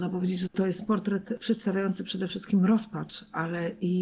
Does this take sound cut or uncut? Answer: uncut